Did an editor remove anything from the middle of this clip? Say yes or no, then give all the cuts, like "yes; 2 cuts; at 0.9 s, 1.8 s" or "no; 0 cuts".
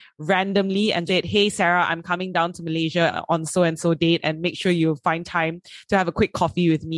yes; 1 cut; at 1.1 s